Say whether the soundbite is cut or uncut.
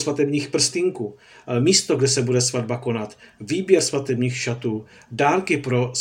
uncut